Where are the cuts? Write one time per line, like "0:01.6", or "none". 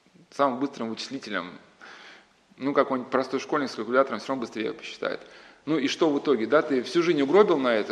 none